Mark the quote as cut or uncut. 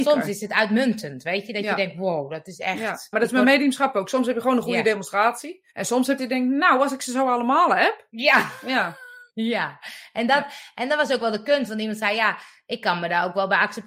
cut